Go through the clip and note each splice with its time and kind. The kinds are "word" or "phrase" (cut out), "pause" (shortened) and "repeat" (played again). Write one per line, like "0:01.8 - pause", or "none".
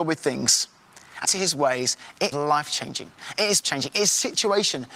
0:01.2 - word
0:02.3 - word
0:03.6 - word